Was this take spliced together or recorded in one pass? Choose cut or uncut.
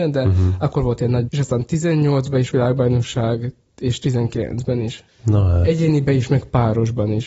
cut